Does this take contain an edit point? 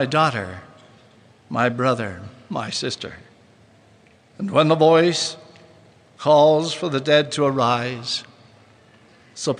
no; 0 cuts

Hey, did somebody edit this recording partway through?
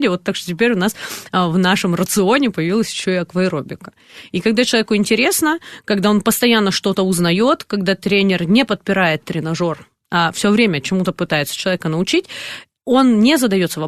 no; 0 cuts

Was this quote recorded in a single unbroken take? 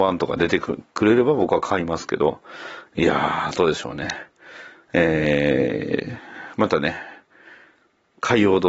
yes; 0 cuts

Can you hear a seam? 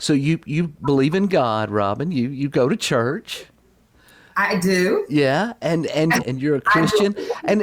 no; 0 cuts

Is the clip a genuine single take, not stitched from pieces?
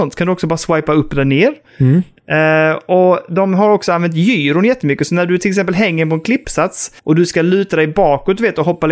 no; 1 cut; at 7.0 s

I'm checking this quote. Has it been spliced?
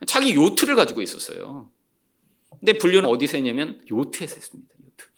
yes; 2 cuts; at 3.0 s, 3.9 s

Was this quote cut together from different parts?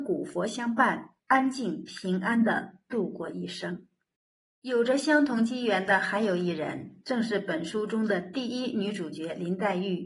yes; 2 cuts; at 1.2 s, 4.2 s

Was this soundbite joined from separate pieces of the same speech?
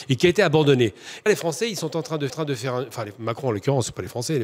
yes; 2 cuts; at 1.3 s, 2.3 s

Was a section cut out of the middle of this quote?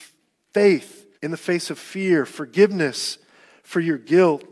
yes; 1 cut; at 1.2 s

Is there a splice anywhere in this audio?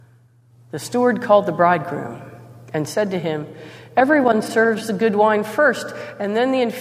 no; 0 cuts

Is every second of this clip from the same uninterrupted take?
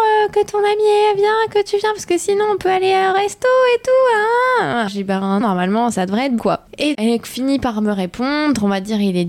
no; 5 cuts; at 4.9 s, 5.4 s, 5.9 s, 6.4 s, 6.9 s

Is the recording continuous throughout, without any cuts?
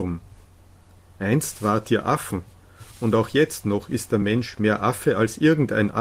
yes; 0 cuts

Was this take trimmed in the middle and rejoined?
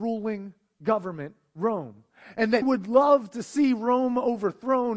yes; 1 cut; at 2.6 s

